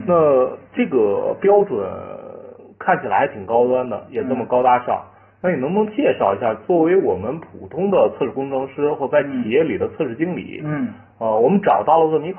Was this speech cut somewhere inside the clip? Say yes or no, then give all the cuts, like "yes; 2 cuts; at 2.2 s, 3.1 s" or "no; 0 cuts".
no; 0 cuts